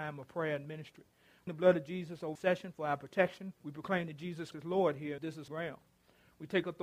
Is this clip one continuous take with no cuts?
no; 6 cuts; at 1.5 s, 2.4 s, 3.6 s, 4.5 s, 5.2 s, 5.5 s

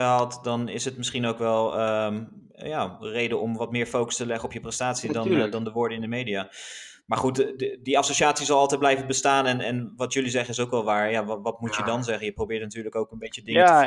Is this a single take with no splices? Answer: yes; 0 cuts

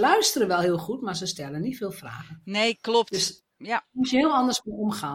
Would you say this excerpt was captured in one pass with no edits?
yes; 0 cuts

